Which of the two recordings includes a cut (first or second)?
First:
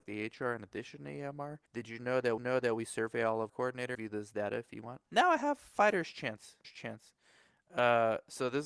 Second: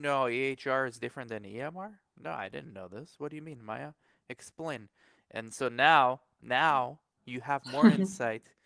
first